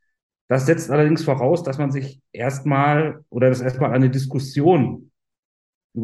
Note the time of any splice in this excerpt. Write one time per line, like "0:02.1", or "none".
0:03.3